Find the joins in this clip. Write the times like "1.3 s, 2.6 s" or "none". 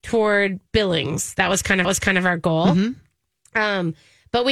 1.8 s

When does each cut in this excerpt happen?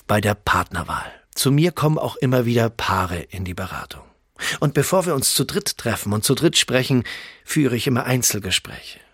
1.2 s

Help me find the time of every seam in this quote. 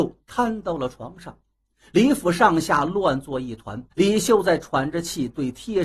3.9 s

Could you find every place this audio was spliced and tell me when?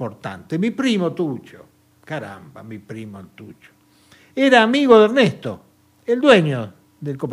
5.7 s

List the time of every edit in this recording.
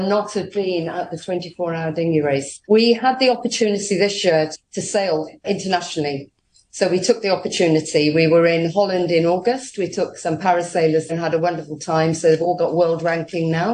2.6 s, 4.5 s, 5.4 s, 11.1 s

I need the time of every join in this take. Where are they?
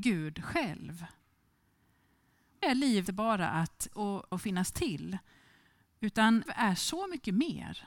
2.6 s, 3.1 s, 3.9 s, 4.3 s, 6.5 s

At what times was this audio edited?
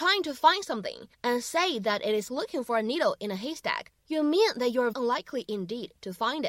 1.1 s, 2.3 s, 4.0 s, 4.9 s

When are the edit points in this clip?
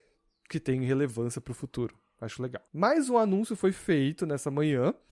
2.7 s

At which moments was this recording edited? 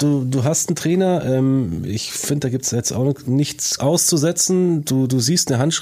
3.8 s

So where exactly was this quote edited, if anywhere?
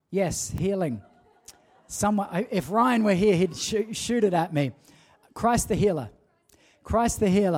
none

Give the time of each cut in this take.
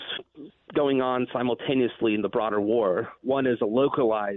none

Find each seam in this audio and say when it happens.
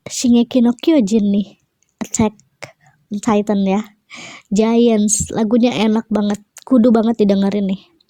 none

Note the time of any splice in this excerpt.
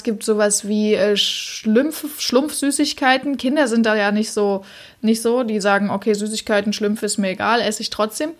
none

